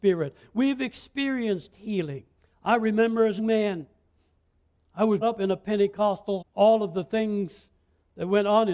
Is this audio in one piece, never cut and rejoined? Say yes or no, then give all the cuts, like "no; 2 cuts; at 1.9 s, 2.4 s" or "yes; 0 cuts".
no; 4 cuts; at 2.4 s, 3.4 s, 5.2 s, 6.4 s